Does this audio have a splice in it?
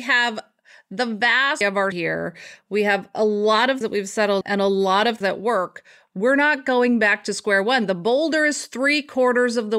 yes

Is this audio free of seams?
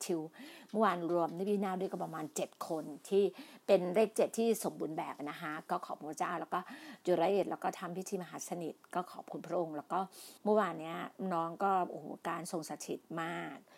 no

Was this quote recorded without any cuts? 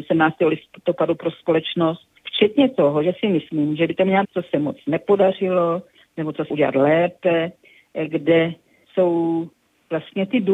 no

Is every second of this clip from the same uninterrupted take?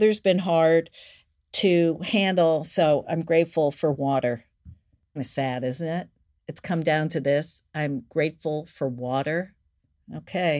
no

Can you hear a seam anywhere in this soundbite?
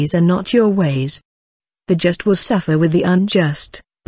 no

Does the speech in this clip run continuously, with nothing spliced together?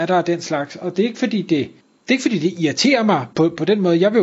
no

